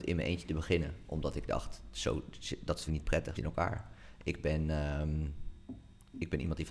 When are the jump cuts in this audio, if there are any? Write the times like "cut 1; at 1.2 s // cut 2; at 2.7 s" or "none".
cut 1; at 2.9 s // cut 2; at 3.3 s